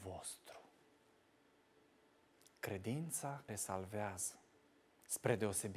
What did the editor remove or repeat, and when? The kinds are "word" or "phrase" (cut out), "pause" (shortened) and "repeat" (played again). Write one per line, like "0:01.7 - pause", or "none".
0:03.5 - word